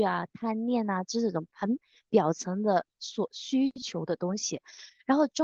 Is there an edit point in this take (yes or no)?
no